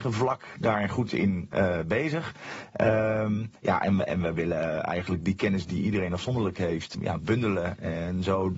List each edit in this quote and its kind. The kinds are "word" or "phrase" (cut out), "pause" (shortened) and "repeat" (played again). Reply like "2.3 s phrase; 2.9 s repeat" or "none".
3.6 s pause; 6.9 s word